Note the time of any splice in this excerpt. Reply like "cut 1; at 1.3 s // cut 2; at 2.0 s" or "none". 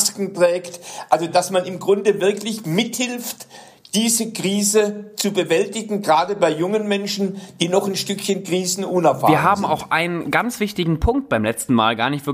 none